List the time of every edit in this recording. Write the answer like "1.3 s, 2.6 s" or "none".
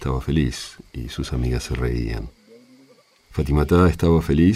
none